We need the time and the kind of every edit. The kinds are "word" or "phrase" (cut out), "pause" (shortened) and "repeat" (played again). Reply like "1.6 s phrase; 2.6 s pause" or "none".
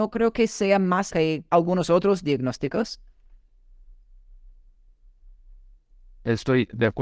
1.1 s word; 1.5 s pause